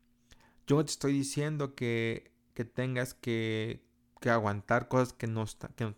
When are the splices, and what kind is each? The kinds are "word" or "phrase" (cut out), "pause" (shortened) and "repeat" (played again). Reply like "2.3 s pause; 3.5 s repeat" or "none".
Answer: 4.0 s pause